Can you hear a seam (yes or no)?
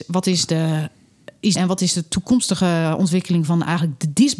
yes